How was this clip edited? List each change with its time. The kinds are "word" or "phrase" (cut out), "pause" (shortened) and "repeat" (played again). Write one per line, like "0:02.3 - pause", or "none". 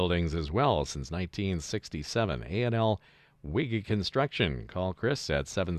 none